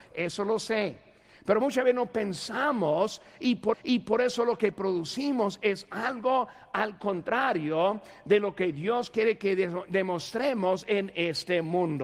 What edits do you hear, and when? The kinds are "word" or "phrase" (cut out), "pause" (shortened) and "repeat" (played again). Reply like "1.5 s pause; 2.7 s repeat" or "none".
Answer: 3.7 s repeat